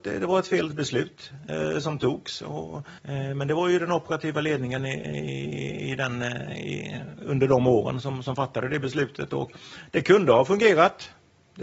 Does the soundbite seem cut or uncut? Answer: cut